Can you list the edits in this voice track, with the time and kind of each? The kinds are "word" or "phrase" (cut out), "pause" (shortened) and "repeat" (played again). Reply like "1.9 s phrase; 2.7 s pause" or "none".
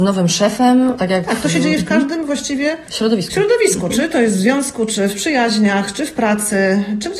1.0 s word